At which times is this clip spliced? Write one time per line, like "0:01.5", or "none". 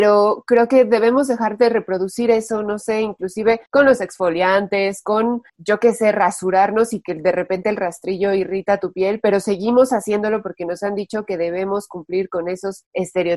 0:03.7
0:05.5